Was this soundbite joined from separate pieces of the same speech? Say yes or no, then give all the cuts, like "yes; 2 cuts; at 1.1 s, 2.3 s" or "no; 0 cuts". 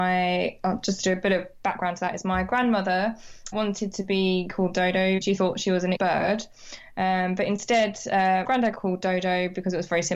yes; 5 cuts; at 3.5 s, 5.2 s, 5.9 s, 8.4 s, 8.7 s